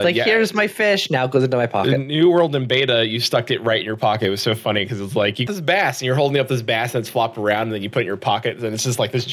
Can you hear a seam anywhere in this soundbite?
yes; 1 cut; at 5.5 s

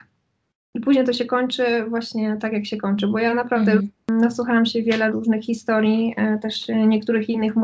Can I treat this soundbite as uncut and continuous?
yes; 0 cuts

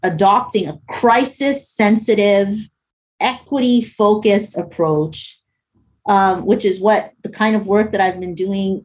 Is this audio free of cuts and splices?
yes; 0 cuts

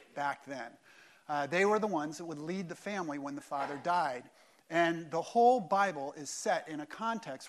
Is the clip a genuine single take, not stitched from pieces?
yes; 0 cuts

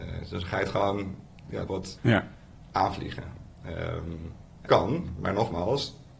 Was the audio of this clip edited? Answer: yes; 3 cuts; at 1.7 s, 2.0 s, 4.7 s

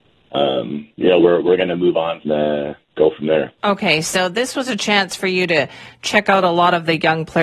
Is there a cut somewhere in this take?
yes; 2 cuts; at 2.2 s, 3.6 s

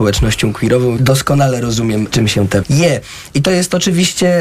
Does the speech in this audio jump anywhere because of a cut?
yes; 3 cuts; at 1.0 s, 2.1 s, 2.6 s

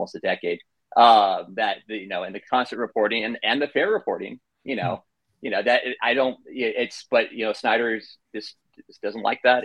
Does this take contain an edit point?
no; 0 cuts

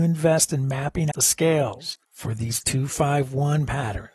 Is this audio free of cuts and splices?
no; 2 cuts; at 1.1 s, 2.0 s

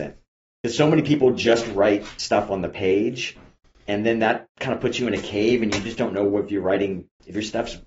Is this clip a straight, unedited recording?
yes; 0 cuts

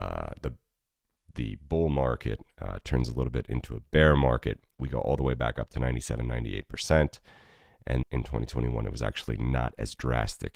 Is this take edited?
yes; 1 cut; at 8.0 s

